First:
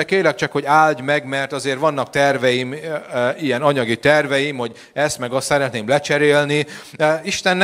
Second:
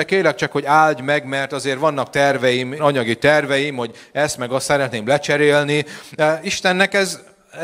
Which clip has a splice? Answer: second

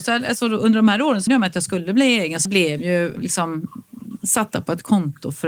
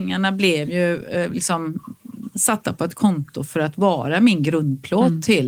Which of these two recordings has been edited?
first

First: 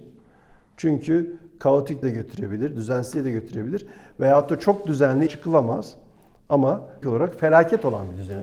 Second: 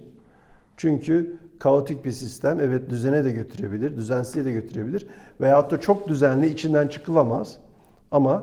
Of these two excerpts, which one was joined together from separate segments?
first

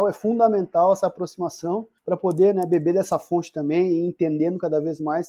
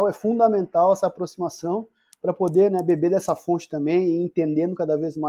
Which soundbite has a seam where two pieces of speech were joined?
first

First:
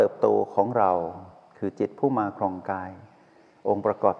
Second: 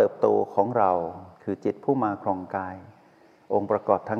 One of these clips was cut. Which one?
second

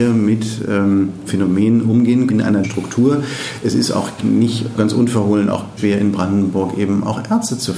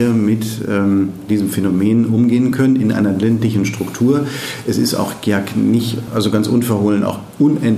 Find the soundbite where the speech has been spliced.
first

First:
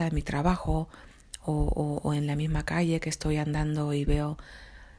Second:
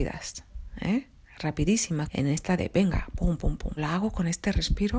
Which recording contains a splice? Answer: second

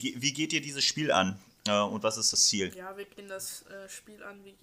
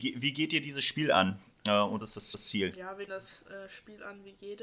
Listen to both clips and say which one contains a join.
second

